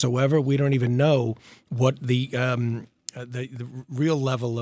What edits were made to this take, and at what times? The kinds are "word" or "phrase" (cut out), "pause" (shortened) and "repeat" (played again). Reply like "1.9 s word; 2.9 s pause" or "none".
none